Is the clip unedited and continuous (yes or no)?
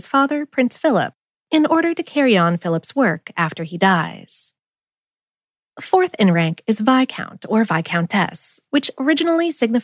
yes